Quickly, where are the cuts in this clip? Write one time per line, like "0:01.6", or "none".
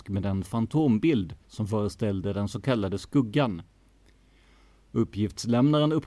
none